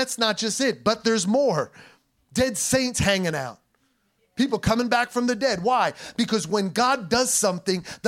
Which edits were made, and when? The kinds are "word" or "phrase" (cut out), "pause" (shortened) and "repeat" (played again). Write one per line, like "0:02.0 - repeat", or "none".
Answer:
none

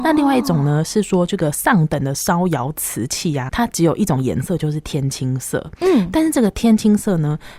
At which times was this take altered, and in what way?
0:03.5 - word

